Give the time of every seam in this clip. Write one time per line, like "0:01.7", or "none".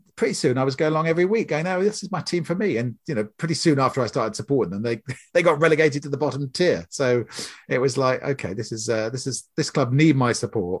none